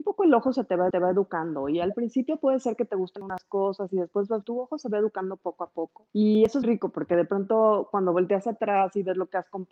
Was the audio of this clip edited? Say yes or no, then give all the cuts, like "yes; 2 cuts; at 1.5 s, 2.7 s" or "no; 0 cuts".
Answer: yes; 4 cuts; at 0.9 s, 4.4 s, 6.1 s, 6.6 s